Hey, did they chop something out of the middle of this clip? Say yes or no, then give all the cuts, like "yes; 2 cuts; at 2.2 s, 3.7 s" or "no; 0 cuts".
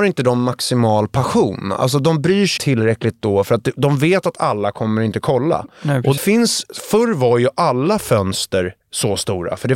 yes; 3 cuts; at 2.6 s, 6.2 s, 8.8 s